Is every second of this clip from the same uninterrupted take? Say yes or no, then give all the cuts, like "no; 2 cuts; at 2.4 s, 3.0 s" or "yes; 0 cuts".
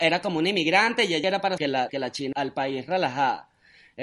no; 4 cuts; at 1.2 s, 1.6 s, 1.9 s, 2.3 s